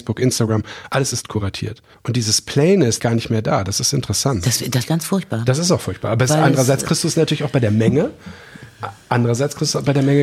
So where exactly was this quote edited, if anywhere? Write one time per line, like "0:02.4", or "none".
0:03.0
0:04.8

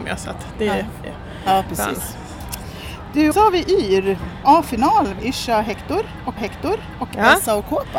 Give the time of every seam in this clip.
0:01.0
0:03.3
0:04.4
0:05.2
0:06.4

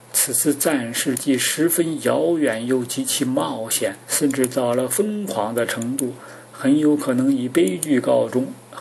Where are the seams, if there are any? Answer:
0:04.0

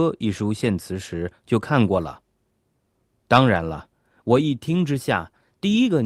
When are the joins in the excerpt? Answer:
none

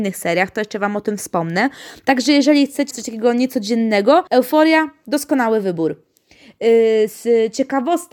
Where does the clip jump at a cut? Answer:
0:02.9
0:04.3

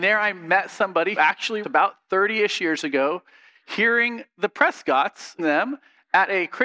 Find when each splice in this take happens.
0:01.2
0:01.6
0:05.4

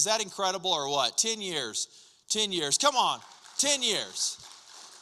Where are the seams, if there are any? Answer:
none

